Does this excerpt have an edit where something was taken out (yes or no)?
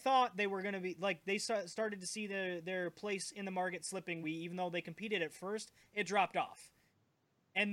yes